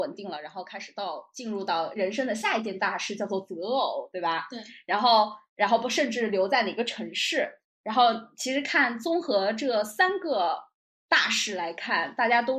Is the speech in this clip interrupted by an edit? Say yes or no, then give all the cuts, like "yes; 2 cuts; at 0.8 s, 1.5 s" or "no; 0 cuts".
no; 0 cuts